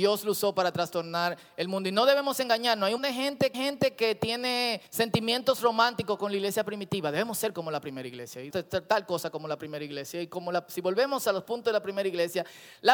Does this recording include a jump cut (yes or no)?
yes